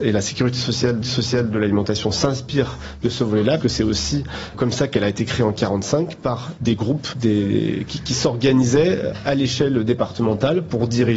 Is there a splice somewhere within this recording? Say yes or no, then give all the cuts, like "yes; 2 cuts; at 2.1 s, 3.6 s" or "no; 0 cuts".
yes; 5 cuts; at 1.0 s, 3.6 s, 4.5 s, 6.6 s, 7.1 s